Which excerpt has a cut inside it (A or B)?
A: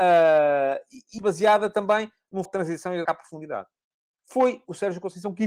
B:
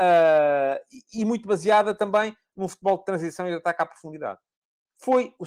A